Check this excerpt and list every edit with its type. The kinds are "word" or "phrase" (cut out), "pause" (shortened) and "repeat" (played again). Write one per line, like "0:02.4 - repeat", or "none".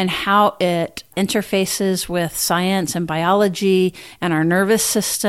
none